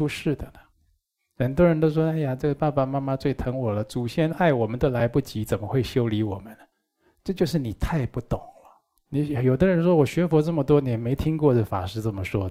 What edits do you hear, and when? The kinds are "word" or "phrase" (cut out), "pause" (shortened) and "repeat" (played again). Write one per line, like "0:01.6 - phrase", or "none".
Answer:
0:06.7 - pause
0:09.0 - pause